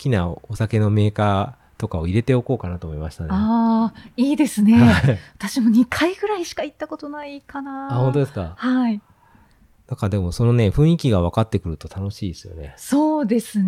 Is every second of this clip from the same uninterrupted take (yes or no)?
yes